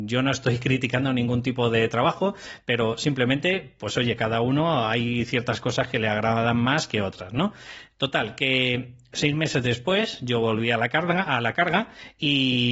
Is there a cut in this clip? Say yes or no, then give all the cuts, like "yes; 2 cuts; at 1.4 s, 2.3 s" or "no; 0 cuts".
no; 0 cuts